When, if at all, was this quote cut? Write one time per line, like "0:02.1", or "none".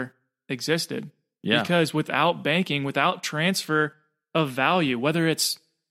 none